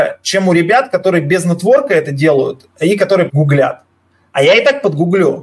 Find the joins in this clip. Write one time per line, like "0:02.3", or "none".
0:03.3